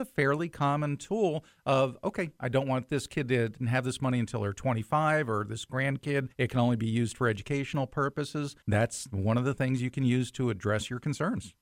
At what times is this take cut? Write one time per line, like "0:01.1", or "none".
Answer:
0:06.3
0:08.6